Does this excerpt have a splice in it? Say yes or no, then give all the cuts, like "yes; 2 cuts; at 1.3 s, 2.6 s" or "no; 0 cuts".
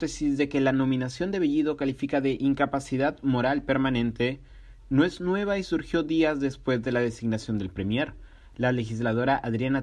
no; 0 cuts